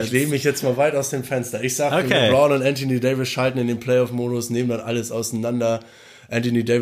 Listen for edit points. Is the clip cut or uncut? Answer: uncut